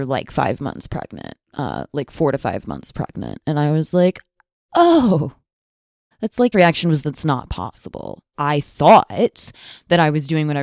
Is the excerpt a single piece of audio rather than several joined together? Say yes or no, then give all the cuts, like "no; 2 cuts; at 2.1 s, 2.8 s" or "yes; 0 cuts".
no; 4 cuts; at 1.4 s, 6.1 s, 6.5 s, 8.3 s